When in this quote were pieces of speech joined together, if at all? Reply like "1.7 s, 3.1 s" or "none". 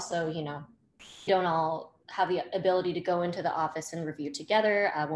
1.3 s